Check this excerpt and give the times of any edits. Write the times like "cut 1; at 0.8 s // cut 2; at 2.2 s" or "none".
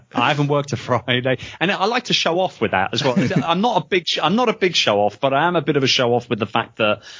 none